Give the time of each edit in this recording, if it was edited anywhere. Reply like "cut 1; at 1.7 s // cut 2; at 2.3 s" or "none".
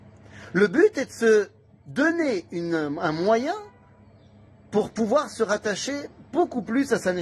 none